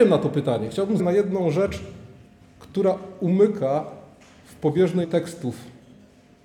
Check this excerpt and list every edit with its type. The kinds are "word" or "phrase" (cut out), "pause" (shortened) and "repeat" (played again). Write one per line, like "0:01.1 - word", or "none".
0:01.0 - phrase
0:05.0 - word